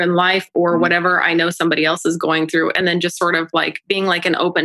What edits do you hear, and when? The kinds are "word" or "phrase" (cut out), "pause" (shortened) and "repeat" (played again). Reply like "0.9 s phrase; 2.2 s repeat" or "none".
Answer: none

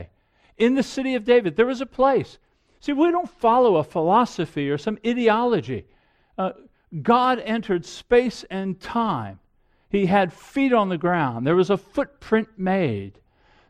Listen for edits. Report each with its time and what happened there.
none

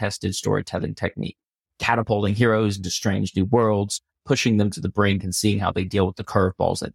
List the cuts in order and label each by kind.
none

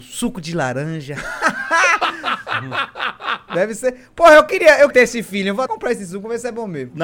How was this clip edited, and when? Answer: 4.9 s word; 5.7 s word

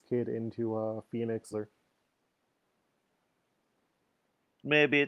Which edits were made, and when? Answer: 1.5 s phrase

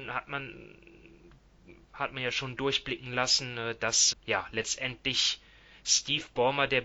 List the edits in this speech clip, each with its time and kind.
4.1 s word

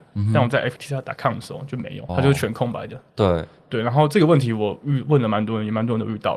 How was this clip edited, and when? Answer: 2.1 s word

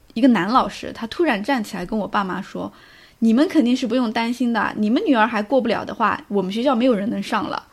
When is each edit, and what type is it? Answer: none

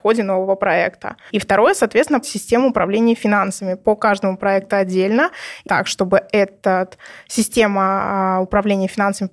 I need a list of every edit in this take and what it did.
2.2 s word; 5.7 s word

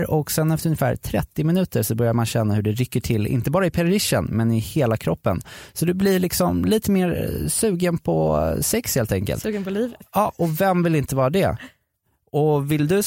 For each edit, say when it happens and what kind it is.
none

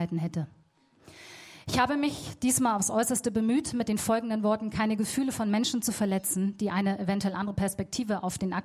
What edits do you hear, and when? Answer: none

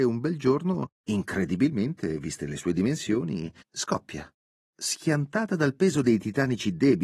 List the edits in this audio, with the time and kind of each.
0.9 s pause; 3.6 s pause

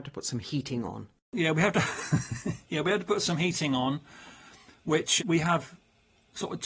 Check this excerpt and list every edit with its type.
5.2 s word

